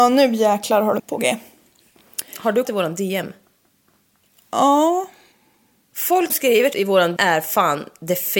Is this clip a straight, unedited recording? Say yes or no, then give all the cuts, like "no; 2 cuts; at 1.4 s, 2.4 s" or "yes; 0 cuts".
no; 5 cuts; at 1.0 s, 2.6 s, 6.3 s, 6.7 s, 7.2 s